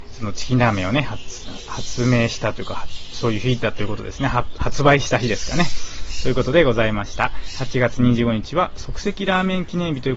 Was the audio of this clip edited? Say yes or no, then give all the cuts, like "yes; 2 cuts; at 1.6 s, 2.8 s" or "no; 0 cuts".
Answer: no; 0 cuts